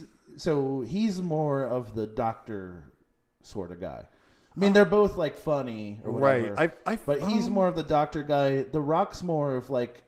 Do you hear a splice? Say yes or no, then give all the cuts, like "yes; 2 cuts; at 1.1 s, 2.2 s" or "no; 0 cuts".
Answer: no; 0 cuts